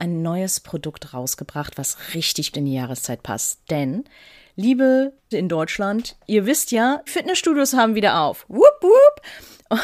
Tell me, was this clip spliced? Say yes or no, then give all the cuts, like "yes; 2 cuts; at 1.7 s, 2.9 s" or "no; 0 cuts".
yes; 3 cuts; at 2.5 s, 5.3 s, 7.1 s